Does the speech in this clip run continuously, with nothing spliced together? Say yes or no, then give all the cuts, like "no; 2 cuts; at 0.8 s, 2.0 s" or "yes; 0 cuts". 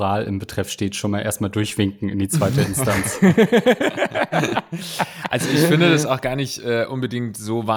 yes; 0 cuts